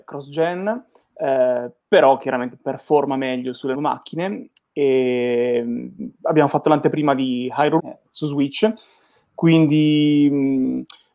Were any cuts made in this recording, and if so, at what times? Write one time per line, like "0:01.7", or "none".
0:01.0
0:03.7
0:06.1
0:07.8